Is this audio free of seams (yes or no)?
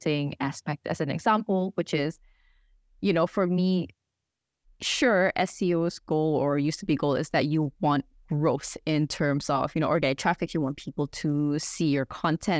yes